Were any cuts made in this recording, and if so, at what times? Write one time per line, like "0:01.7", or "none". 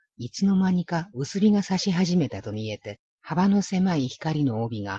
0:03.1